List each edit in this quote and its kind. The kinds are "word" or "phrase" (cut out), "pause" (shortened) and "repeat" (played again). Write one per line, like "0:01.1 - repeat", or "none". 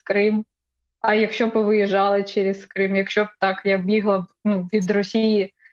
none